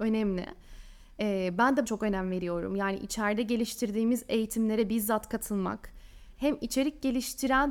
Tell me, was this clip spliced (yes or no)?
yes